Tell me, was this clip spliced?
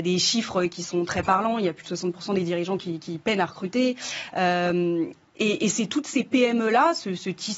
no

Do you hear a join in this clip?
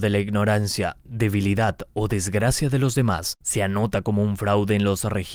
no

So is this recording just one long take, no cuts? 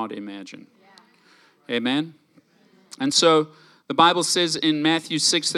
yes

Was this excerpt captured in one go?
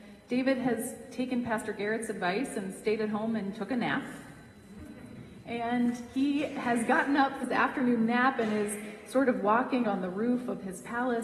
no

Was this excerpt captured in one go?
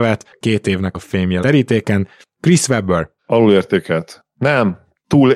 no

